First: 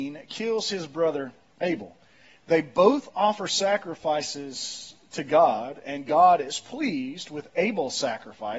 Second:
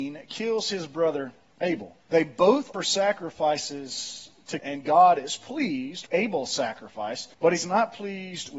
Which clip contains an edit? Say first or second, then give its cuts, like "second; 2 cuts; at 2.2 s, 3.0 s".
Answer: second; 5 cuts; at 2.0 s, 2.7 s, 4.6 s, 6.1 s, 7.3 s